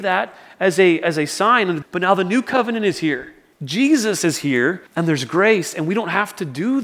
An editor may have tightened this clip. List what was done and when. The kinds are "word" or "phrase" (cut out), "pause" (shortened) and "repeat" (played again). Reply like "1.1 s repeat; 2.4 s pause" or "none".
1.8 s phrase; 3.5 s pause; 4.9 s pause